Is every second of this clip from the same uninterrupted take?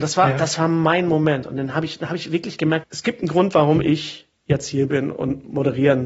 no; 1 cut; at 2.8 s

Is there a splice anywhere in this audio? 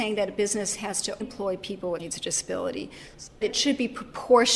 yes; 3 cuts; at 1.2 s, 2.0 s, 3.4 s

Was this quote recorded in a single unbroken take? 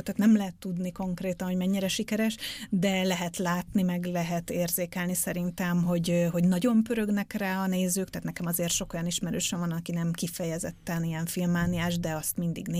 yes; 0 cuts

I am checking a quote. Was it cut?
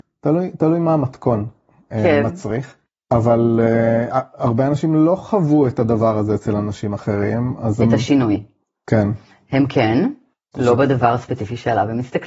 no; 0 cuts

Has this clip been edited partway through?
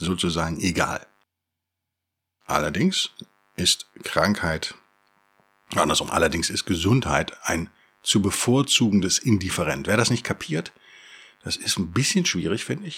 no; 0 cuts

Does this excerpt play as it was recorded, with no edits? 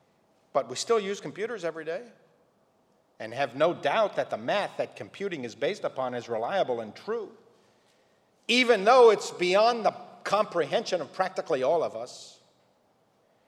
yes; 0 cuts

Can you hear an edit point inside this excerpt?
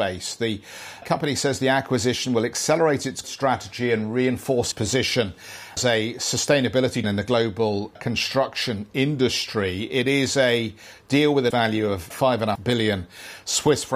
yes; 9 cuts; at 1.0 s, 3.2 s, 4.7 s, 5.8 s, 7.0 s, 8.0 s, 11.5 s, 12.1 s, 12.6 s

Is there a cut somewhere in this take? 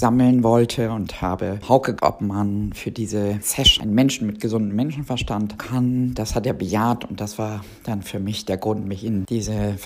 yes; 2 cuts; at 2.0 s, 5.6 s

